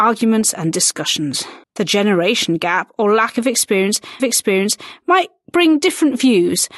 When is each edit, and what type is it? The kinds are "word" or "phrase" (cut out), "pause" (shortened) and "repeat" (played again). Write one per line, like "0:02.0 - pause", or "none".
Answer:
0:01.6 - pause
0:04.2 - repeat